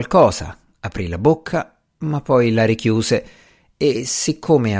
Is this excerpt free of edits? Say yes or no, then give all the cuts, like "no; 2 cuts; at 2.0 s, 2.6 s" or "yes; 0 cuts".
yes; 0 cuts